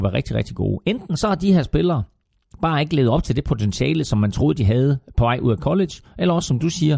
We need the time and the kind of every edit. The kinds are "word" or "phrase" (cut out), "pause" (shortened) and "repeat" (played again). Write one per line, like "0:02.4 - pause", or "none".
none